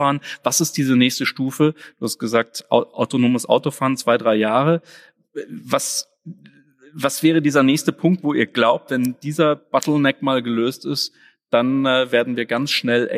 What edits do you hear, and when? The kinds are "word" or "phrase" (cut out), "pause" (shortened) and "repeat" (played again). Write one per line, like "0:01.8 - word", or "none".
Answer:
none